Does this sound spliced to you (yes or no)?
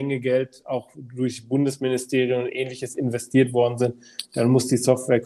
no